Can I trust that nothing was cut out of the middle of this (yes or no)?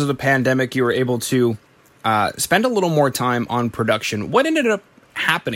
yes